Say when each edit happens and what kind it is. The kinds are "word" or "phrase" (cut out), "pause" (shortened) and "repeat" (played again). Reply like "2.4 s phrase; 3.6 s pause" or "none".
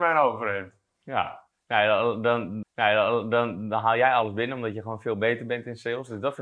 2.6 s repeat